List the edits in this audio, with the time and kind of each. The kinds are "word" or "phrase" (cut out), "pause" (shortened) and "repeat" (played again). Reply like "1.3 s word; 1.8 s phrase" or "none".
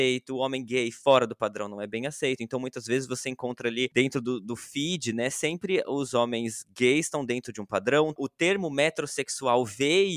none